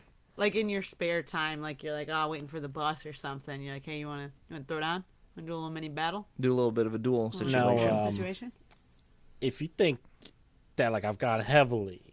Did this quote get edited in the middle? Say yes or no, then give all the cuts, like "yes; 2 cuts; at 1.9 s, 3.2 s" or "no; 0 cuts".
no; 0 cuts